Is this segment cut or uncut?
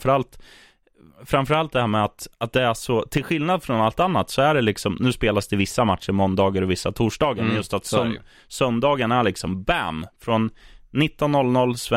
uncut